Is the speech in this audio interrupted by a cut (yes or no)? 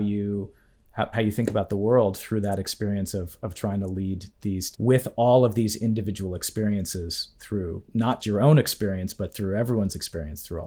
yes